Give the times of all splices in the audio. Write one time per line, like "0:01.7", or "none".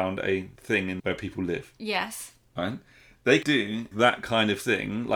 0:01.0
0:03.4
0:03.9